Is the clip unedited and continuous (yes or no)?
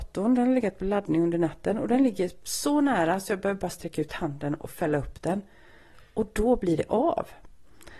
yes